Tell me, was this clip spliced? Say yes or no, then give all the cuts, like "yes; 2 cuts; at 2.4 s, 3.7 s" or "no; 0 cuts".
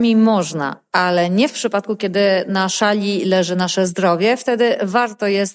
no; 0 cuts